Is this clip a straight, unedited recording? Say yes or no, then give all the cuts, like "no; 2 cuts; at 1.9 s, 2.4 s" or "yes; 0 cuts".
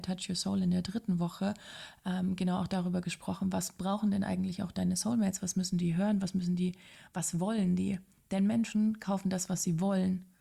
yes; 0 cuts